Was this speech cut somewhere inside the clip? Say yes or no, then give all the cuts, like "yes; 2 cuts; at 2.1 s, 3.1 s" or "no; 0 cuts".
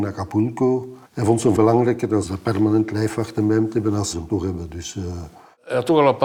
yes; 3 cuts; at 1.0 s, 1.6 s, 4.1 s